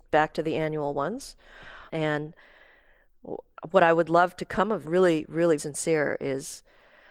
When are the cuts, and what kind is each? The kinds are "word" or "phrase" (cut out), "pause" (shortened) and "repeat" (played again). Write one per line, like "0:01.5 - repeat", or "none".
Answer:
0:04.8 - phrase
0:05.6 - word

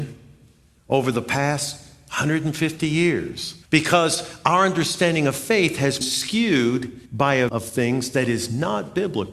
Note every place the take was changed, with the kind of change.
0:03.6 - pause
0:06.0 - word
0:07.1 - pause
0:07.5 - word

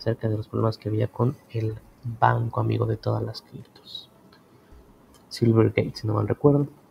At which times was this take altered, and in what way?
none

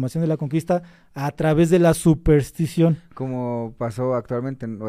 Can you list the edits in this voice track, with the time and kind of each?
none

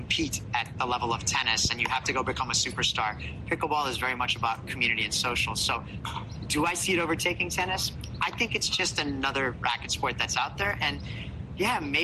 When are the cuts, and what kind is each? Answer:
none

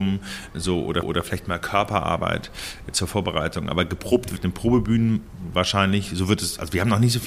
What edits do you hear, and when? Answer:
0:01.0 - repeat
0:04.4 - word

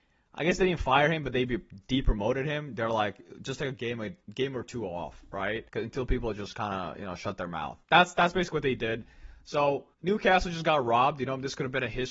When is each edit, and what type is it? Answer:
0:04.2 - pause
0:05.7 - pause
0:07.8 - pause
0:09.9 - pause

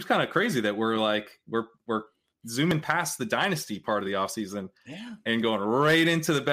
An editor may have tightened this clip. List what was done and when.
none

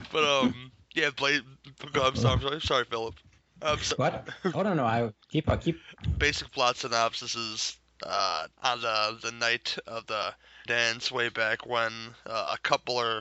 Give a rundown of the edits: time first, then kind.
0:05.2 - pause
0:06.0 - word
0:08.5 - pause
0:10.7 - word

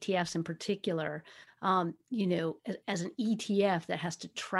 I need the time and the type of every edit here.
none

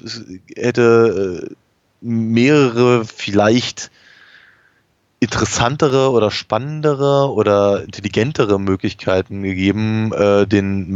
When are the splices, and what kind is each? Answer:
none

